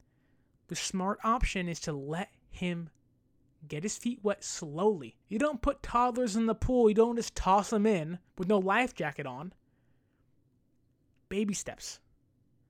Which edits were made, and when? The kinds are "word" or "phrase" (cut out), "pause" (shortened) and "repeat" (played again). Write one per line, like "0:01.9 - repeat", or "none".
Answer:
0:05.2 - pause
0:08.3 - pause